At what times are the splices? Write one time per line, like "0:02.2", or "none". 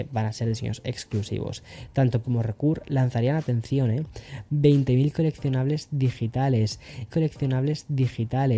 0:02.2
0:07.1